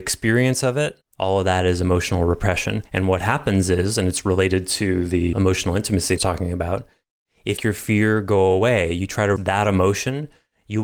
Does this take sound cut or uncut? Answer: cut